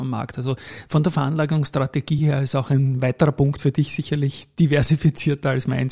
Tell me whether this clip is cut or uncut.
uncut